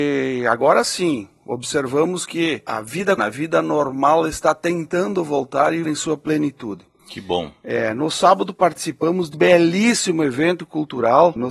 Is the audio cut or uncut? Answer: cut